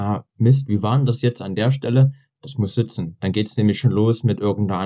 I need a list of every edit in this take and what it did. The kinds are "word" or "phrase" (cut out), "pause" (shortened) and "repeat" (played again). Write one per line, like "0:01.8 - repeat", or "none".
none